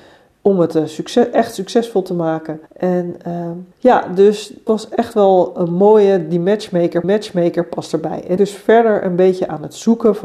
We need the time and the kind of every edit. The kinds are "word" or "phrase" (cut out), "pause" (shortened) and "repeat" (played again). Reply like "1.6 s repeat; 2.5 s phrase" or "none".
2.7 s pause; 3.7 s pause; 4.7 s word; 7.0 s repeat; 8.4 s phrase